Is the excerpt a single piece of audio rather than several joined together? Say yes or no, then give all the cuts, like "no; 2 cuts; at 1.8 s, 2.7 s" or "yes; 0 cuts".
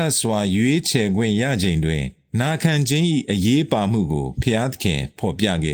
yes; 0 cuts